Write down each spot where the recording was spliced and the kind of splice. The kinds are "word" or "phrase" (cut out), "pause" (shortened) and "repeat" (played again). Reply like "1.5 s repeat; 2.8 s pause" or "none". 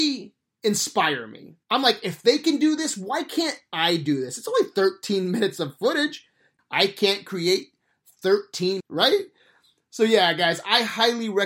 1.6 s pause; 8.8 s phrase